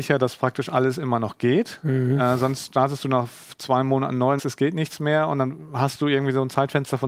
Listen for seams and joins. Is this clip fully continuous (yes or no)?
no